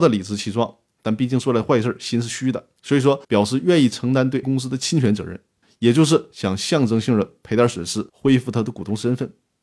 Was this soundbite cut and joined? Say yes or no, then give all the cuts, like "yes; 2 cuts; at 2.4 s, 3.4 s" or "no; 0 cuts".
yes; 4 cuts; at 2.8 s, 3.2 s, 4.4 s, 8.1 s